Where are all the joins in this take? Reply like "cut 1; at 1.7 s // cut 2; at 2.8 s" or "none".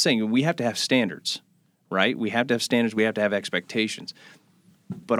none